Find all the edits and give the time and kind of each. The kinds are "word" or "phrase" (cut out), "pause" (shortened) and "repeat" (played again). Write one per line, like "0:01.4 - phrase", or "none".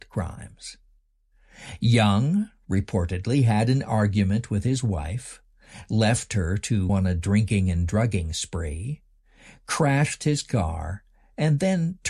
0:06.9 - word

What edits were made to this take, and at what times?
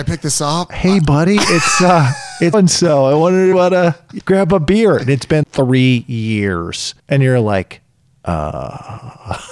0:02.5 - word
0:03.5 - phrase
0:04.2 - word
0:05.4 - word
0:07.0 - pause
0:07.9 - pause

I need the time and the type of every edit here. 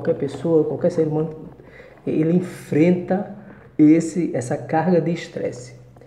none

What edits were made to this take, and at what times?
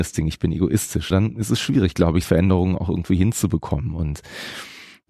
0:01.1 - word
0:02.2 - word

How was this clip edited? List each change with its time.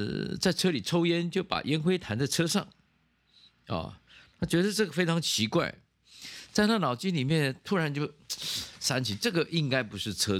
none

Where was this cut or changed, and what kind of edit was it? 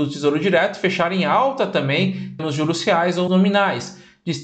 0:02.4 - word
0:03.3 - word

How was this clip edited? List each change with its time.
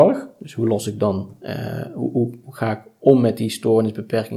none

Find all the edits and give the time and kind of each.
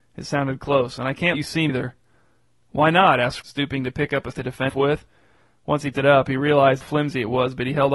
0:01.3 - word
0:01.7 - word
0:03.4 - word
0:04.3 - word
0:04.7 - word
0:05.9 - word
0:06.8 - word

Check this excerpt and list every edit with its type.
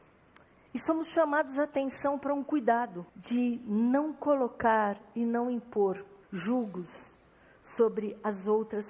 0:03.1 - pause
0:06.2 - pause

